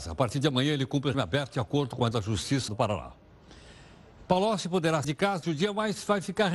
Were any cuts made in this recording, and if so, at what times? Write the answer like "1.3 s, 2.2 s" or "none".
1.1 s, 2.1 s, 2.7 s, 5.0 s, 5.4 s